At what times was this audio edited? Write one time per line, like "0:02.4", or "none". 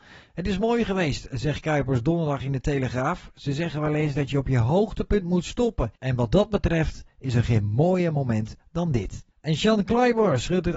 0:06.0
0:09.3

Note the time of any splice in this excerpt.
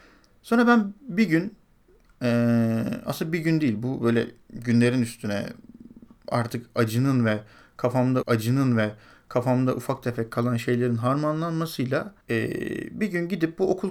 0:08.2
0:12.2

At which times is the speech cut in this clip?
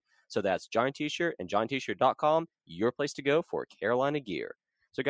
none

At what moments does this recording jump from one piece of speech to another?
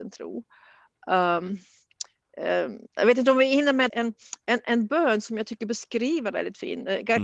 0:02.9
0:03.9
0:06.3

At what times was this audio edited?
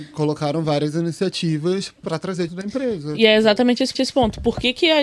0:02.5
0:03.9

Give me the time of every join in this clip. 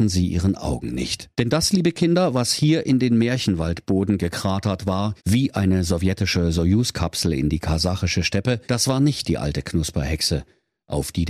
0:01.3
0:05.2
0:08.6

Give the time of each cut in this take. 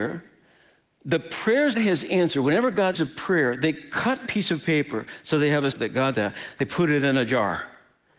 0:01.7
0:02.9
0:04.3
0:05.7
0:06.1

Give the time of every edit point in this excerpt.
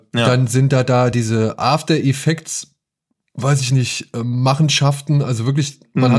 none

